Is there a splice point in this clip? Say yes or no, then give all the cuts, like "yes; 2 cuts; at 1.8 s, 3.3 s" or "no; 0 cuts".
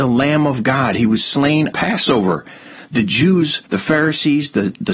yes; 2 cuts; at 1.7 s, 3.7 s